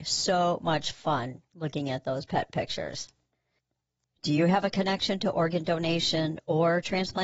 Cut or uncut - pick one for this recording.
uncut